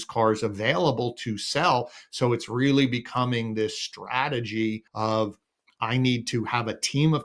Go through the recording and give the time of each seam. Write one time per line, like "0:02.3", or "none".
0:04.9